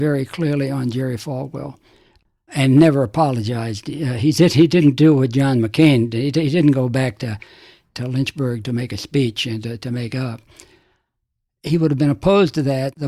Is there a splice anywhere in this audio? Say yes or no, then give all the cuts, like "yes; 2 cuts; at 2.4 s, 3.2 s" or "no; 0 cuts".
no; 0 cuts